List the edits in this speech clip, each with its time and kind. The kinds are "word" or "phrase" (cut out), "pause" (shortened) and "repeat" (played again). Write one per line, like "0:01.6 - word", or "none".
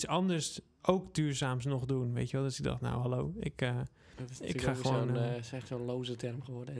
none